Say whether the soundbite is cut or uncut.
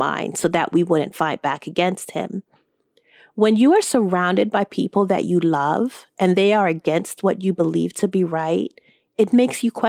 uncut